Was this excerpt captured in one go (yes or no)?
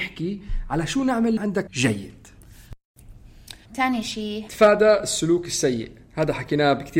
no